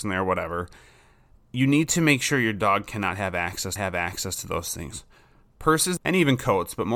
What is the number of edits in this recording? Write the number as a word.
two